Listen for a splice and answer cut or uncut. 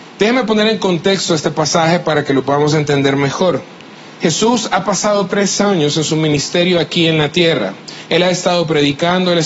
uncut